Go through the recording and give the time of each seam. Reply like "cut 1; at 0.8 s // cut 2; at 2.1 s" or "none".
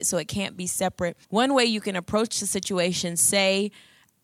cut 1; at 1.2 s